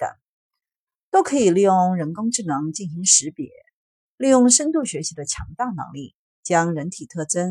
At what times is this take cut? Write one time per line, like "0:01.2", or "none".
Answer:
none